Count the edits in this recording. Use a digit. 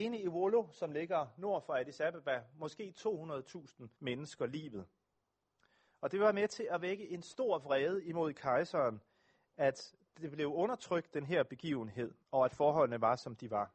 2